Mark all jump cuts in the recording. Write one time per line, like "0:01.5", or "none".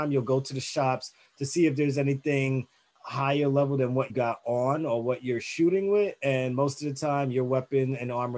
0:02.9
0:04.1